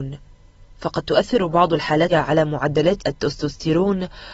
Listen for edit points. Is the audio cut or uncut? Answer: cut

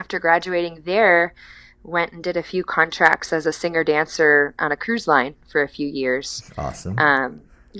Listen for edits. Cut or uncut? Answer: uncut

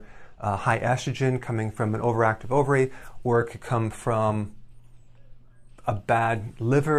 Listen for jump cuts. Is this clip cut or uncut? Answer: uncut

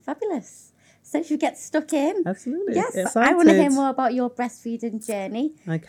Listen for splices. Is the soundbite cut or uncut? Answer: cut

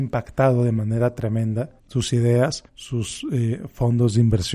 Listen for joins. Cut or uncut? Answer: cut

